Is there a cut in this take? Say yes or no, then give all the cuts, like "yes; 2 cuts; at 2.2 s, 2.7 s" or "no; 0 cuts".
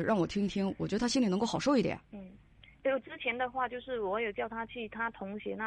yes; 1 cut; at 2.0 s